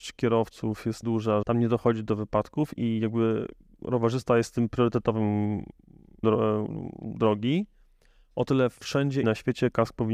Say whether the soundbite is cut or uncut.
cut